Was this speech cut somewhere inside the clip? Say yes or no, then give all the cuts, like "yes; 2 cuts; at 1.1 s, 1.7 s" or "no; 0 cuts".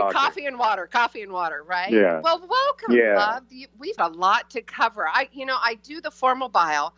yes; 1 cut; at 4.0 s